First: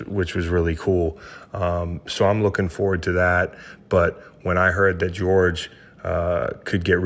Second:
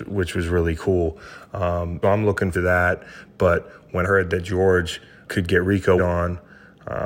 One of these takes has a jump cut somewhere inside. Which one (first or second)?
second